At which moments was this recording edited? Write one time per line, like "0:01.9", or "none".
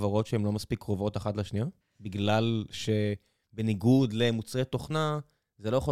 0:01.8